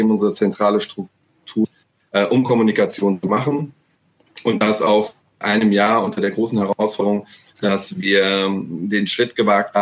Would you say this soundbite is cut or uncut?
uncut